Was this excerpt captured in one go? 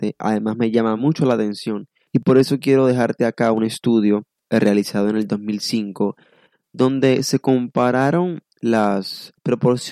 yes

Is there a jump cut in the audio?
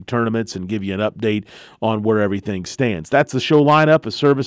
no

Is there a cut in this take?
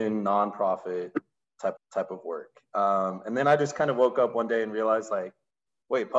yes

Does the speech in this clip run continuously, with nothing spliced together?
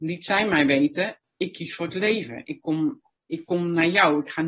yes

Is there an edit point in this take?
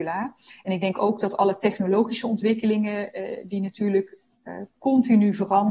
no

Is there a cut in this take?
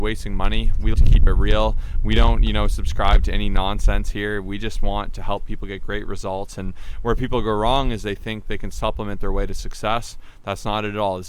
yes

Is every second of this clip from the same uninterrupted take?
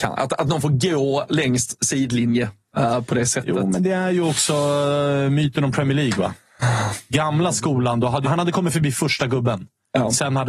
no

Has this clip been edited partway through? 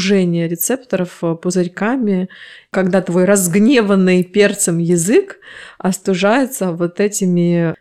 no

